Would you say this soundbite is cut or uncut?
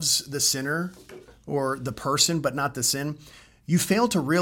uncut